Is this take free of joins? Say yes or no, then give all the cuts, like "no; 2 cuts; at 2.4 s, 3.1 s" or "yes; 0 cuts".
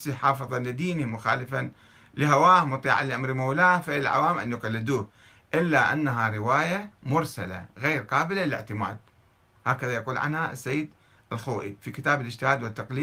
yes; 0 cuts